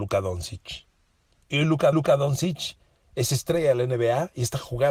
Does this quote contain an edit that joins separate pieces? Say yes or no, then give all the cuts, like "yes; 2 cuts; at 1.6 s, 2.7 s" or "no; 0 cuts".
yes; 1 cut; at 1.9 s